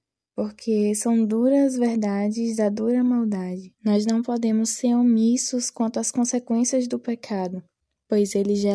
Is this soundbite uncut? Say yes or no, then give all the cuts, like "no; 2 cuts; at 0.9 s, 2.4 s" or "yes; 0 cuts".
no; 1 cut; at 3.8 s